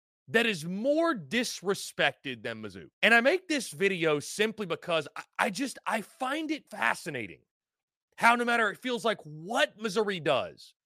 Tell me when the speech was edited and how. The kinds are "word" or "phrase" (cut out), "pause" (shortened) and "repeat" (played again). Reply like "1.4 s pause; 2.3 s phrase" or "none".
2.9 s pause; 6.7 s pause